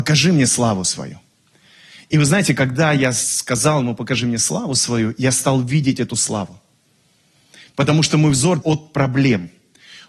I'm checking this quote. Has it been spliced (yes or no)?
yes